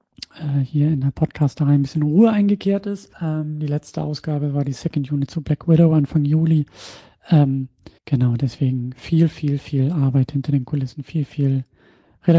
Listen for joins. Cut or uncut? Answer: cut